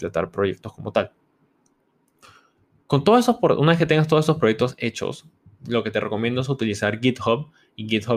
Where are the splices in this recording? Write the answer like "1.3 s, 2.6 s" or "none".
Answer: none